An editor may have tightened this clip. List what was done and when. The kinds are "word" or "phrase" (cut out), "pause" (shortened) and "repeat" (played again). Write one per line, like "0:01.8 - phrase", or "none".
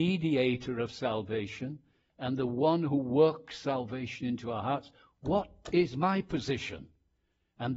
none